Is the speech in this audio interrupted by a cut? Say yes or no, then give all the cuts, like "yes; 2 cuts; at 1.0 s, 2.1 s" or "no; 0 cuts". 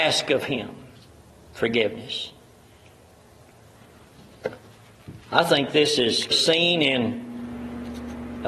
yes; 2 cuts; at 1.1 s, 6.3 s